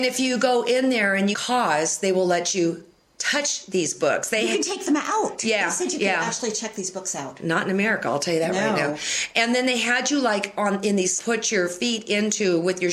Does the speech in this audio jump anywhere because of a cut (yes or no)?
yes